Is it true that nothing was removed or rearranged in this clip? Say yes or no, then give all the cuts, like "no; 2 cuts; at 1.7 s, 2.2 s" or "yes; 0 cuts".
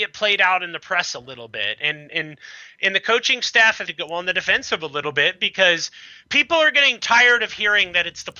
no; 1 cut; at 3.9 s